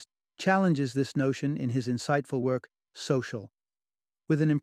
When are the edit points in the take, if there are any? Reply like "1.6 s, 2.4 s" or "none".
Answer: none

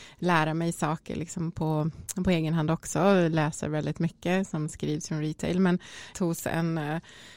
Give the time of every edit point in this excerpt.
5.1 s, 6.1 s

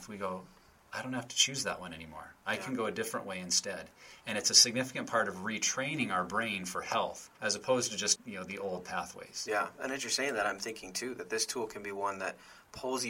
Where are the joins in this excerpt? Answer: 7.4 s, 8.2 s

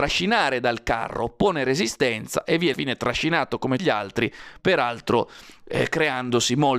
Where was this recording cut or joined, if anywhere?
2.7 s, 3.8 s

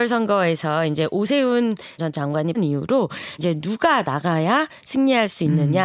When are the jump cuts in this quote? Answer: 2.0 s, 2.5 s, 3.4 s

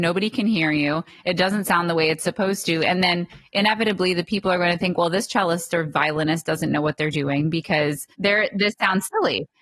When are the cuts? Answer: 8.1 s

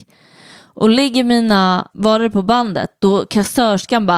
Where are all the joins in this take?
1.9 s

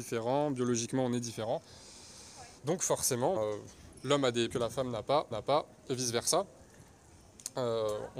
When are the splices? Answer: 2.6 s, 3.4 s, 4.5 s, 5.3 s

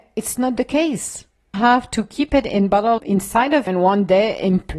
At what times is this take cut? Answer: 1.5 s, 3.0 s, 3.7 s

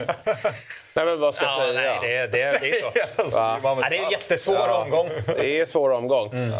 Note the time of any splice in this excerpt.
none

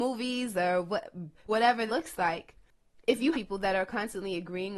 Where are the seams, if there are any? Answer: 1.5 s, 1.9 s, 3.3 s

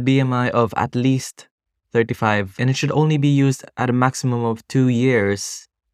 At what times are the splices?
none

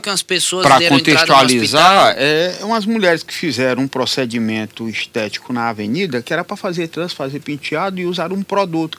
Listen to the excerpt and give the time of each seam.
none

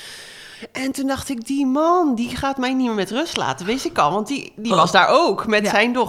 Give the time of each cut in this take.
none

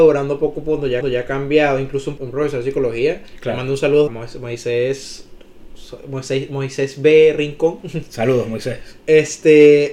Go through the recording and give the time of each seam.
1.0 s, 2.2 s, 4.1 s

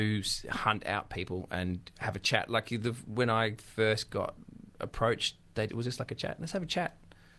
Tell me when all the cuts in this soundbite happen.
4.7 s, 5.7 s

